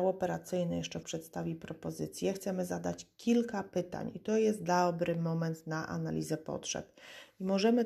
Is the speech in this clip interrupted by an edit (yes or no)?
yes